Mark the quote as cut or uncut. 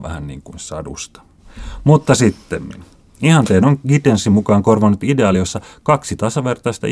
uncut